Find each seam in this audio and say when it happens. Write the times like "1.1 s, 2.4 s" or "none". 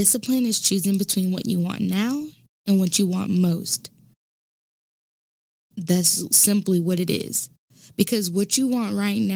none